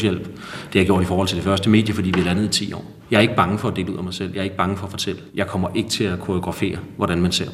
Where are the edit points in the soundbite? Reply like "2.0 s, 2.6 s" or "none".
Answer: 3.0 s, 5.3 s